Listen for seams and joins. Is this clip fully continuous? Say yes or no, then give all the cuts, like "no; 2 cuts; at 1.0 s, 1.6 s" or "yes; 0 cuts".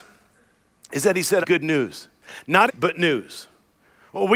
no; 2 cuts; at 1.4 s, 2.7 s